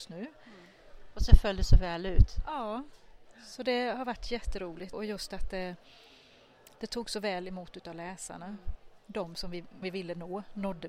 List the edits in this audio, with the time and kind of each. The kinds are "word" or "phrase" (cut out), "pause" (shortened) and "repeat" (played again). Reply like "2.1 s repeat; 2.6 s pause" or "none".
4.9 s word; 9.8 s word